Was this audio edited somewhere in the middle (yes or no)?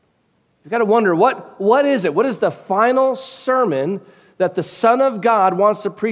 no